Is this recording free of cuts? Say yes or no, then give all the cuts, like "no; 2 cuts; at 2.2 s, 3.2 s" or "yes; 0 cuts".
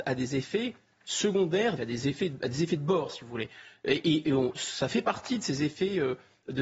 no; 1 cut; at 1.8 s